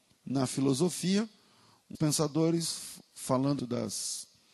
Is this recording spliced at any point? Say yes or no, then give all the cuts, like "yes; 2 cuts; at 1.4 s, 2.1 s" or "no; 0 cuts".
yes; 2 cuts; at 1.9 s, 3.6 s